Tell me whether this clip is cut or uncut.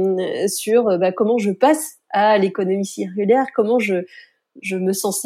uncut